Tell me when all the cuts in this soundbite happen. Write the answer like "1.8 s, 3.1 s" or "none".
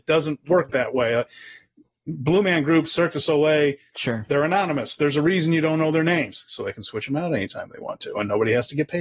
none